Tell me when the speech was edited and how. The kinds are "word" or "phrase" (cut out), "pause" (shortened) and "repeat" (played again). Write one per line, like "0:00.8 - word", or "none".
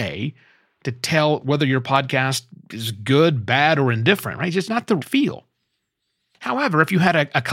0:04.6 - word
0:05.0 - word